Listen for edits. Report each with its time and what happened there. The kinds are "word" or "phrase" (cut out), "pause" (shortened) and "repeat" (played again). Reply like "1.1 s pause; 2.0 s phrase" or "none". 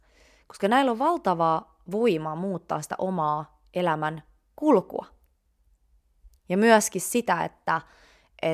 none